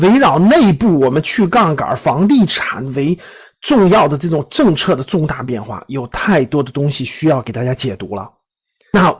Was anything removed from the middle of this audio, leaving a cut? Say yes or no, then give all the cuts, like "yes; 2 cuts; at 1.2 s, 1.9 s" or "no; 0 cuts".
no; 0 cuts